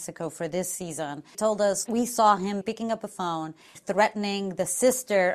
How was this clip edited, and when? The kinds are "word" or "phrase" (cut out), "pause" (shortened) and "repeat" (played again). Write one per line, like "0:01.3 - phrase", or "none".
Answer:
0:01.3 - word
0:01.9 - word
0:02.6 - word
0:03.7 - word